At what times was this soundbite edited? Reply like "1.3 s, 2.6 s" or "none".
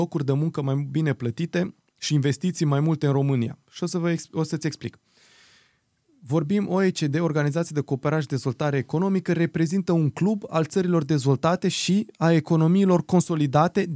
none